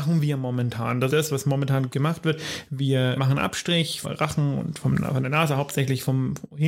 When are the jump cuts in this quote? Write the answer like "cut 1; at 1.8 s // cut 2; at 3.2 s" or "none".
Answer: cut 1; at 1.1 s // cut 2; at 1.9 s // cut 3; at 3.2 s // cut 4; at 4.0 s